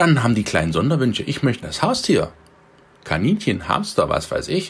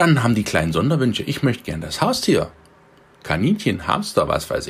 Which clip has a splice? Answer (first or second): first